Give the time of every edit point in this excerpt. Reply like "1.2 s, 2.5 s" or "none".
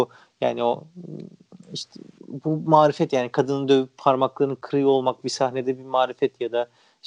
1.6 s